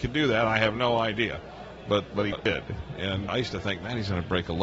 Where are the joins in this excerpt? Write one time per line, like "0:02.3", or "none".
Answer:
0:02.1
0:03.3